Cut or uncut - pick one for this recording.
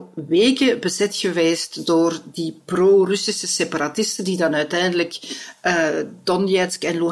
uncut